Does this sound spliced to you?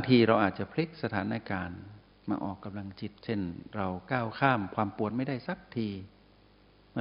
yes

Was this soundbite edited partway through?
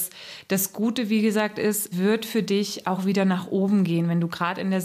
yes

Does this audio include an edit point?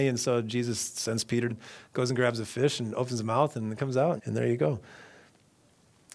yes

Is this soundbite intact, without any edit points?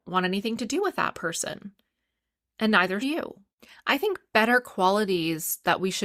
no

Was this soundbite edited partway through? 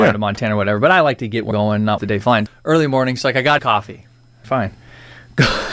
yes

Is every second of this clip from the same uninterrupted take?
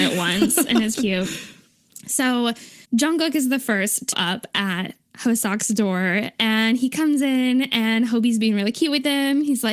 no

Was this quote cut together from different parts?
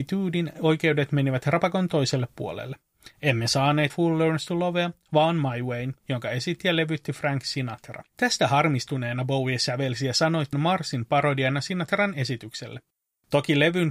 yes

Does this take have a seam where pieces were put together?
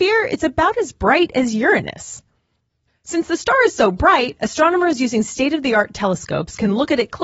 no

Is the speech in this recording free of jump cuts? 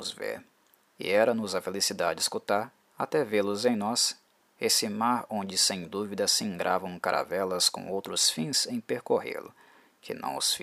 yes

